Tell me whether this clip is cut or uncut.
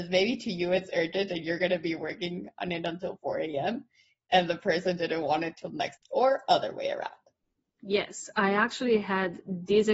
uncut